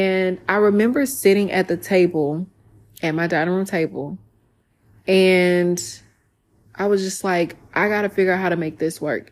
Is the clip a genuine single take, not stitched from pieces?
yes; 0 cuts

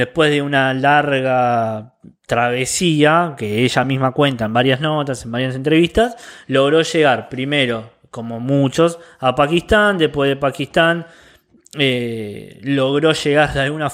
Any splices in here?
no; 0 cuts

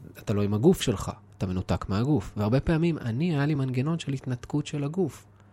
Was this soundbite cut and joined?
no; 0 cuts

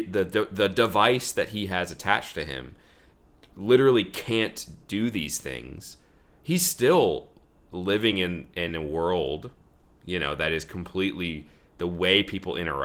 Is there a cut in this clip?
no; 0 cuts

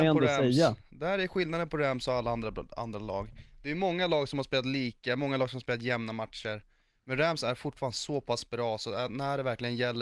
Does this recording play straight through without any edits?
yes; 0 cuts

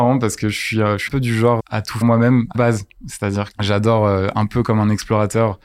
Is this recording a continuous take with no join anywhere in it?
no; 5 cuts; at 1.1 s, 1.6 s, 2.0 s, 2.5 s, 3.5 s

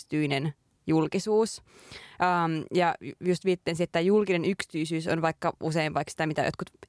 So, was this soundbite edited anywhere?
no; 0 cuts

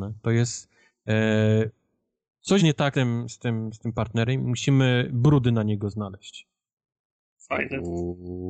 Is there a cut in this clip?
yes; 2 cuts; at 2.6 s, 2.9 s

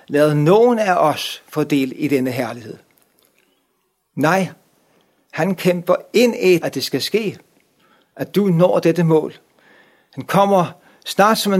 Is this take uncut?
no; 1 cut; at 6.6 s

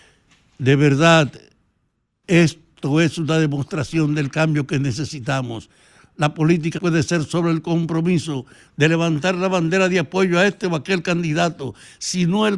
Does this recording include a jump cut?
yes; 1 cut; at 6.8 s

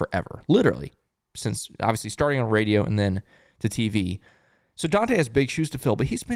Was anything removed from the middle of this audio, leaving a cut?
no; 0 cuts

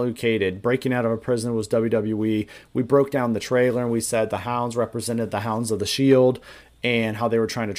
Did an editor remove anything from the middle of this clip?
no; 0 cuts

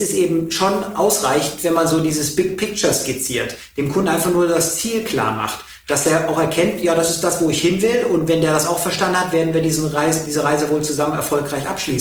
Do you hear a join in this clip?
no; 0 cuts

